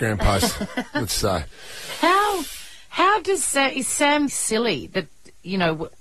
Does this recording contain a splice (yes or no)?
yes